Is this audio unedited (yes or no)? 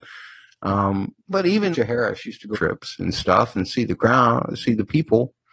no